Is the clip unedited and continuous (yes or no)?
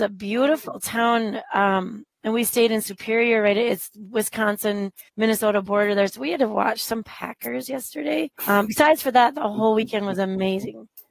no